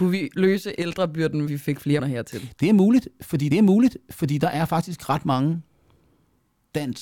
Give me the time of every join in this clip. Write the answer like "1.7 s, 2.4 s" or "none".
1.5 s, 2.0 s, 3.5 s